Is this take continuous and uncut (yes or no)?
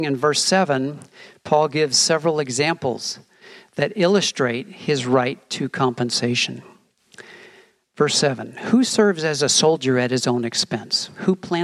yes